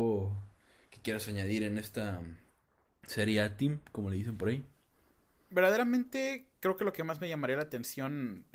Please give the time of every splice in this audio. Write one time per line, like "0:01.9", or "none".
none